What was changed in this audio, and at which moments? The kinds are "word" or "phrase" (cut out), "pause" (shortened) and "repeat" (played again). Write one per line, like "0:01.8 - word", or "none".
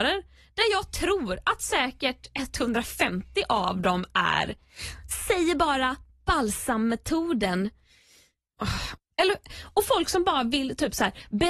none